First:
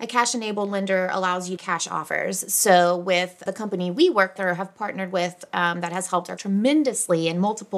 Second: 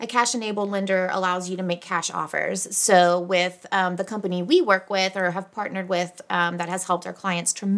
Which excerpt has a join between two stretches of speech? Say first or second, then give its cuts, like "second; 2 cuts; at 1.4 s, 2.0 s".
first; 4 cuts; at 1.6 s, 3.5 s, 4.4 s, 6.4 s